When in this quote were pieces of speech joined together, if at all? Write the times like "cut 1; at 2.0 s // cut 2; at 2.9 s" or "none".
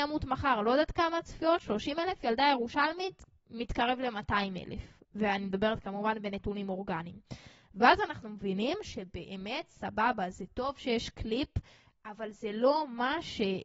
none